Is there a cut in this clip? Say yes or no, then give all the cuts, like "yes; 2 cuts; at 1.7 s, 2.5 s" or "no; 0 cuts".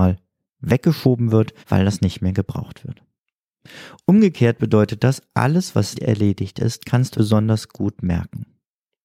yes; 3 cuts; at 1.6 s, 5.9 s, 7.1 s